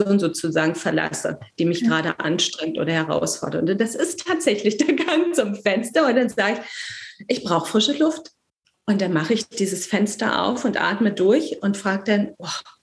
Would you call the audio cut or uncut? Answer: uncut